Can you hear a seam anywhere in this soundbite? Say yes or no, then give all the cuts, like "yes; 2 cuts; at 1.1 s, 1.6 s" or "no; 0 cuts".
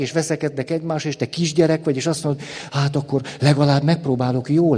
no; 0 cuts